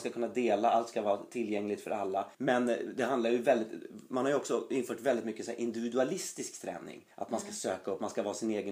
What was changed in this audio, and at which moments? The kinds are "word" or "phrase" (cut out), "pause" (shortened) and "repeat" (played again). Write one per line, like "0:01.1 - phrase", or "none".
0:02.3 - pause
0:07.1 - pause

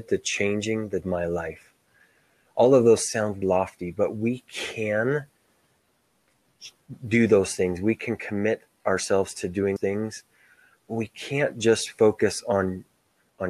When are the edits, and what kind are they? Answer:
0:01.0 - phrase
0:03.1 - word
0:03.4 - word
0:09.8 - word

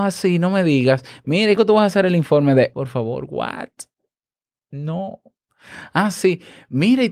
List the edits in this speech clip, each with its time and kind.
0:01.6 - word
0:02.7 - word

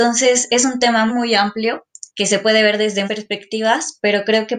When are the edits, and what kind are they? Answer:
0:01.1 - word
0:02.1 - pause
0:03.1 - word

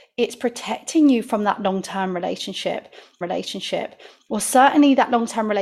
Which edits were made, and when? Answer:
0:03.2 - repeat

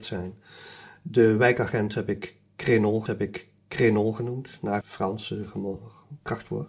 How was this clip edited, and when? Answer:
0:03.1 - repeat
0:04.8 - word

